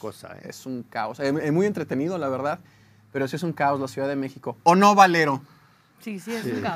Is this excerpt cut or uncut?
uncut